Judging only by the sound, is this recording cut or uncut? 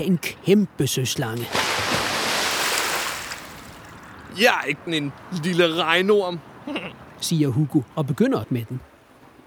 cut